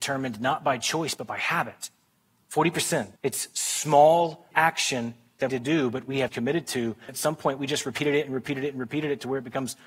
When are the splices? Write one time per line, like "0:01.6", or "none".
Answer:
0:03.2
0:04.5
0:05.5
0:06.3
0:07.1